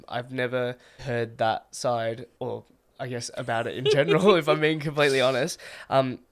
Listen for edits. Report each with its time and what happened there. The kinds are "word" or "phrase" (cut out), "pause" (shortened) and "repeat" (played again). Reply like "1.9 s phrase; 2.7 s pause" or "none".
1.0 s word; 2.3 s pause